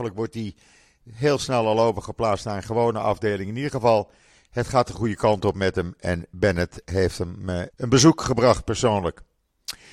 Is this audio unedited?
no; 1 cut; at 7.7 s

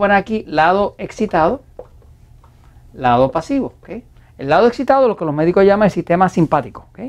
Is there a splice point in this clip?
no; 0 cuts

